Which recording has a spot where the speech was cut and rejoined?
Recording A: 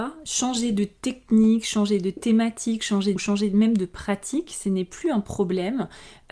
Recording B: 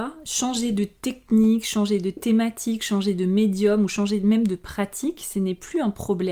A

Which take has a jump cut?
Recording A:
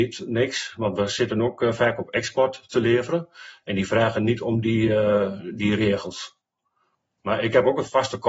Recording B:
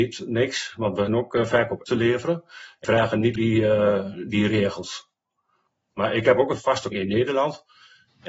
B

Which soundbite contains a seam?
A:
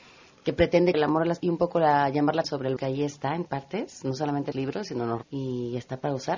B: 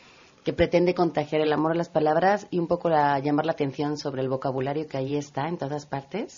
A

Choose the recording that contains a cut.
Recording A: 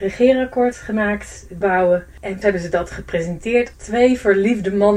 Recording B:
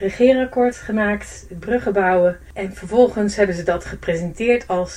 A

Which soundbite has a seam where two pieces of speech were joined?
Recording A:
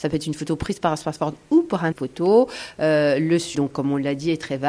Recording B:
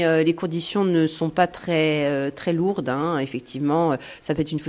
A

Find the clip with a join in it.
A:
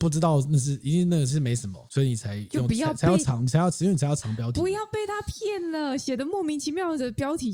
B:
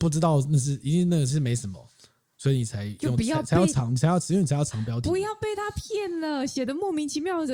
A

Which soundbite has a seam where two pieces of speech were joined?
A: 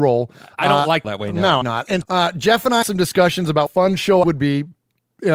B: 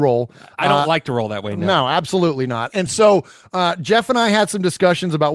A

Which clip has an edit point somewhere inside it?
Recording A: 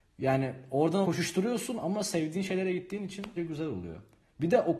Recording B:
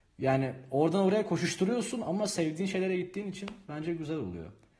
A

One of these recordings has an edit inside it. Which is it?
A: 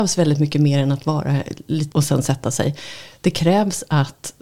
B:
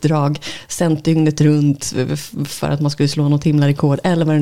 A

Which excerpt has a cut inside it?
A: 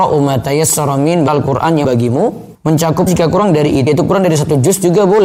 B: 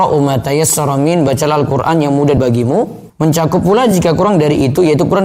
A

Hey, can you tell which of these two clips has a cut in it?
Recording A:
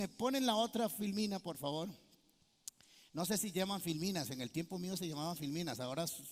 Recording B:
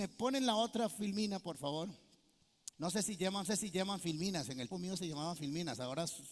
B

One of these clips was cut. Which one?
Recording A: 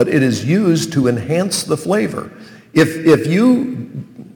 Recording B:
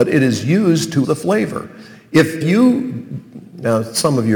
B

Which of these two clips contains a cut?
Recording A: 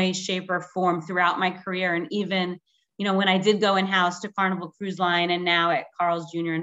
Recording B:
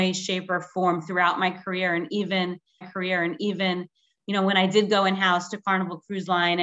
B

